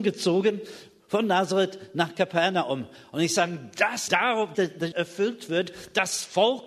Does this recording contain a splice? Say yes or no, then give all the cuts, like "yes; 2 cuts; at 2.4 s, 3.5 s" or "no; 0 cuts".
yes; 3 cuts; at 4.1 s, 4.5 s, 4.9 s